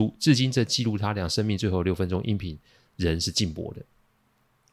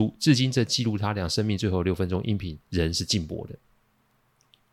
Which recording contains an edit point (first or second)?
second